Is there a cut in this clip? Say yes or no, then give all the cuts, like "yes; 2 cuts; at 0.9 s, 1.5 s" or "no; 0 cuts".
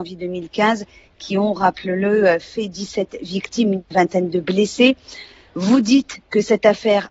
no; 0 cuts